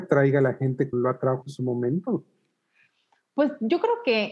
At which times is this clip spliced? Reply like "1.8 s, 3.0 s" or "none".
0.9 s, 1.4 s